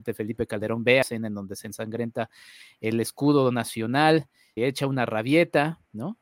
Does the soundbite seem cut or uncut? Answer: cut